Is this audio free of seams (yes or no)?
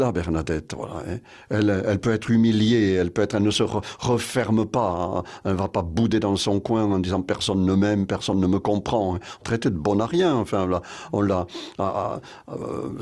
no